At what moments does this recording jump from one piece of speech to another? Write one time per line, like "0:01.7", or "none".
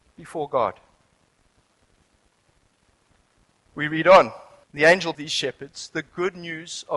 0:04.6
0:05.1